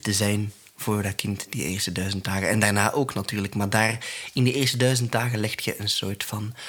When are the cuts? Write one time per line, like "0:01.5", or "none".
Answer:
none